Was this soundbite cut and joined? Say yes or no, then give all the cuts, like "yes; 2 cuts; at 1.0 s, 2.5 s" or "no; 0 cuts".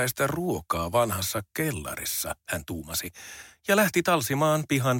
yes; 1 cut; at 2.4 s